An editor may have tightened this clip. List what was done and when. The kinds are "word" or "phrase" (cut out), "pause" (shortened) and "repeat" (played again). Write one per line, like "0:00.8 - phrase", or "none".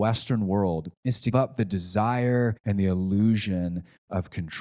0:01.0 - pause
0:01.3 - word
0:02.6 - pause